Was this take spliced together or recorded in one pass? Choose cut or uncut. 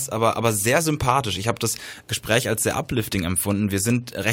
uncut